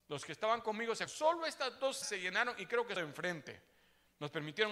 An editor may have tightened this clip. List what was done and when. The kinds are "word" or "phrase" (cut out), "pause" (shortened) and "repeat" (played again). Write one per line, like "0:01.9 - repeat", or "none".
0:01.1 - word
0:02.0 - word
0:03.0 - word